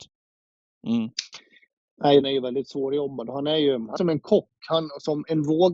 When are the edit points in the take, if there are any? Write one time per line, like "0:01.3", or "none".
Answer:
0:02.2
0:04.0